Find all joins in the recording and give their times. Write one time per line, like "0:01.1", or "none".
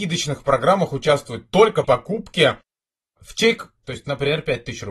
0:01.8
0:03.8